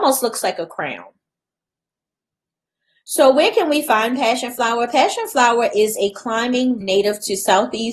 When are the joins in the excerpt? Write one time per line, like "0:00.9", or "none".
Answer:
0:06.8